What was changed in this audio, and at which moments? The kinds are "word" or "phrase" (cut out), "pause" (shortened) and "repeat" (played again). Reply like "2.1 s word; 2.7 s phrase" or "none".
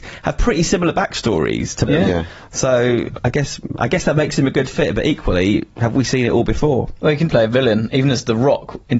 1.9 s phrase; 7.3 s word